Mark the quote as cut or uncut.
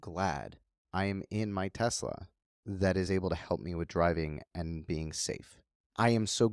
uncut